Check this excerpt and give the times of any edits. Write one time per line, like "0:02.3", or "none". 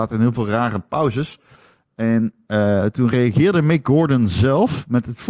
none